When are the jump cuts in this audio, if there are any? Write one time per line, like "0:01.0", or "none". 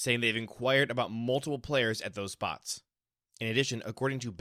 none